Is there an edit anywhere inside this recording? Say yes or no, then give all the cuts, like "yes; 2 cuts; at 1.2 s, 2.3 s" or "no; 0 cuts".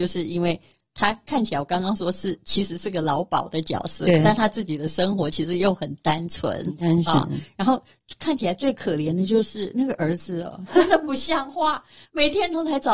no; 0 cuts